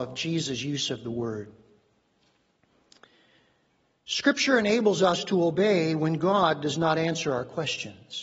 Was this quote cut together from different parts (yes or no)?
no